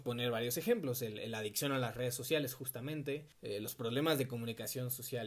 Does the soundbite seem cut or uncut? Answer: cut